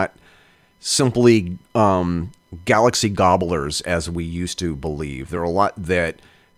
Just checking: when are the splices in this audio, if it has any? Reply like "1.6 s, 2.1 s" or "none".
none